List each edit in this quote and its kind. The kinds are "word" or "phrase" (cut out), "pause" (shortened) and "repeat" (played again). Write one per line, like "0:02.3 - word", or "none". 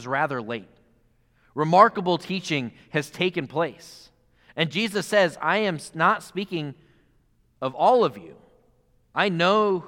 none